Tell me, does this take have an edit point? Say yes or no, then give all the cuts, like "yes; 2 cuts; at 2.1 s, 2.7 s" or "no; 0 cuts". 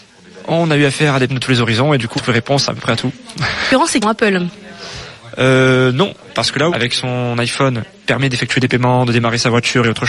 yes; 4 cuts; at 1.3 s, 2.2 s, 4.0 s, 6.7 s